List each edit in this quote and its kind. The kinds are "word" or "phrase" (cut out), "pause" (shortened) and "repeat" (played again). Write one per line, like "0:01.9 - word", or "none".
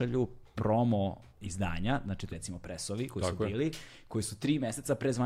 0:01.3 - pause
0:02.3 - phrase